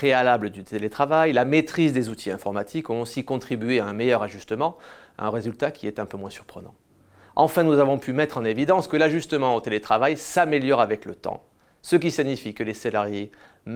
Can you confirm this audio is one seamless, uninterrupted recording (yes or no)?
yes